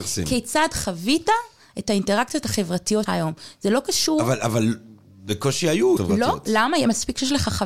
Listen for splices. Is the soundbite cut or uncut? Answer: cut